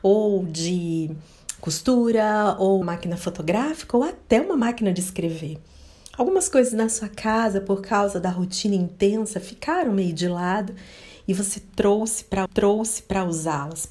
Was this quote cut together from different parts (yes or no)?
yes